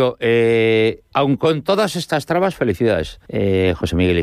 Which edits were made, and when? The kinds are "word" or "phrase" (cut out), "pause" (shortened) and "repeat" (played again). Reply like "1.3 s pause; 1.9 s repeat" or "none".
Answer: 1.1 s pause; 3.2 s pause

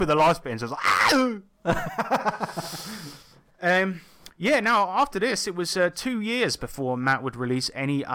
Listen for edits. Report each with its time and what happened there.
none

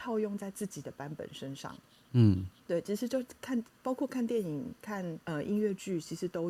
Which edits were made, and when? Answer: 2.6 s pause; 5.2 s pause

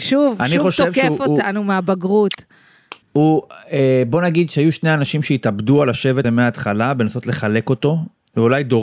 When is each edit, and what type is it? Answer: 3.0 s pause; 6.2 s word

